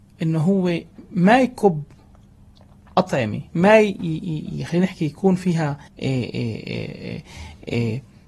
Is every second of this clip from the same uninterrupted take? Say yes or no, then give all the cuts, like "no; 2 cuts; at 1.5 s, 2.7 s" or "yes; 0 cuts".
no; 2 cuts; at 3.5 s, 5.9 s